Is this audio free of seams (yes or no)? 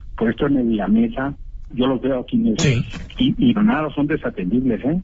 no